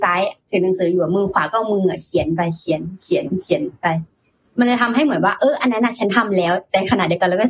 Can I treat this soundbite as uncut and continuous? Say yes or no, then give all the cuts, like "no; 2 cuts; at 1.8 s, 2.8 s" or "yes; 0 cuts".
yes; 0 cuts